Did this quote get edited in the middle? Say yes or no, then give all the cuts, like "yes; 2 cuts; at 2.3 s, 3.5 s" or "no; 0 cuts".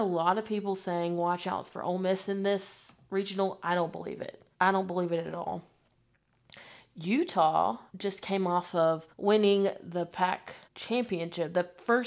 yes; 4 cuts; at 4.5 s, 7.9 s, 9.1 s, 10.6 s